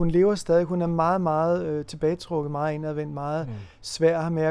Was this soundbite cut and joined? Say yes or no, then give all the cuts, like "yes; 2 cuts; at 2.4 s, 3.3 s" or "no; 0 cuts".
no; 0 cuts